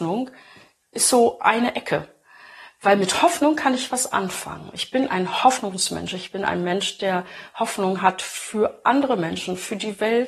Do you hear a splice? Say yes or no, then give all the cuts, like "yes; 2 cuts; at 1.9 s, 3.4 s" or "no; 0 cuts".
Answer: no; 0 cuts